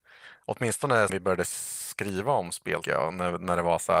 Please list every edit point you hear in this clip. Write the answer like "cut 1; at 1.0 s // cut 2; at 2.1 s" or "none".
cut 1; at 1.1 s // cut 2; at 2.8 s